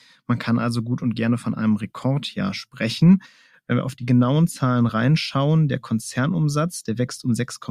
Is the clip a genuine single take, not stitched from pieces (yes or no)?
yes